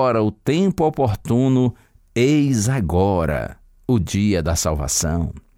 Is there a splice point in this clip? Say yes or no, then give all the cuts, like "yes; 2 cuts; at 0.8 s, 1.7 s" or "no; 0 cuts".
no; 0 cuts